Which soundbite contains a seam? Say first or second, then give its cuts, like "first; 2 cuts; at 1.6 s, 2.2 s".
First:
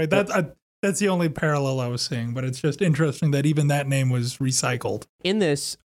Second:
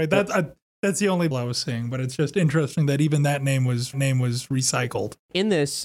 second; 2 cuts; at 1.3 s, 3.9 s